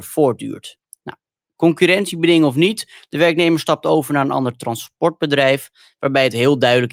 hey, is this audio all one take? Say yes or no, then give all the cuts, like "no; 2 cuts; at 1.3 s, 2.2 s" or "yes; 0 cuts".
yes; 0 cuts